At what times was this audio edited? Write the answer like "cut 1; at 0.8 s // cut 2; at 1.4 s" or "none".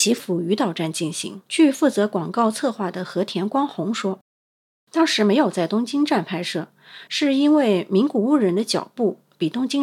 cut 1; at 1.5 s